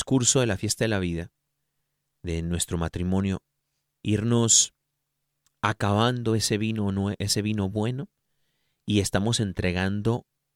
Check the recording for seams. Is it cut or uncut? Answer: uncut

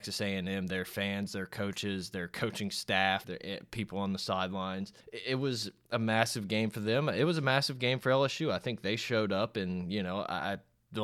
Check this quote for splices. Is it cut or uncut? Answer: cut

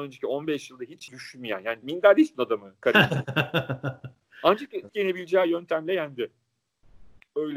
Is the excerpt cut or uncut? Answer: cut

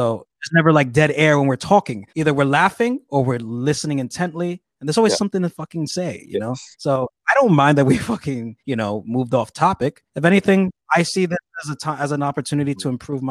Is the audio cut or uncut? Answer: cut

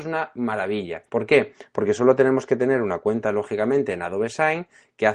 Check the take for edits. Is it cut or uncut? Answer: cut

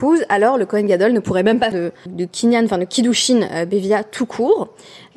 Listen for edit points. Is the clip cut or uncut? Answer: cut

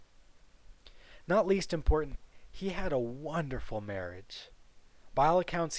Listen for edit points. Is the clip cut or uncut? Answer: uncut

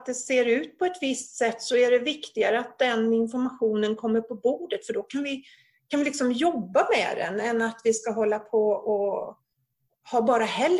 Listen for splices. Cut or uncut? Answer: uncut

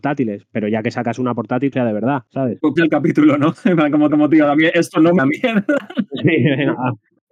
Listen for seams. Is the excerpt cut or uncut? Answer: cut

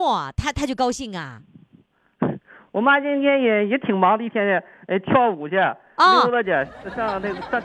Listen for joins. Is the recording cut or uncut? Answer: uncut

